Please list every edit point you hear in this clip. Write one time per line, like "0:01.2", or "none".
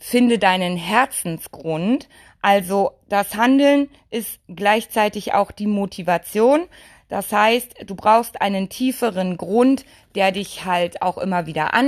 none